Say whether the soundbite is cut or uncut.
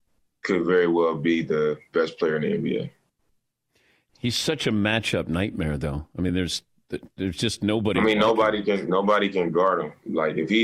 uncut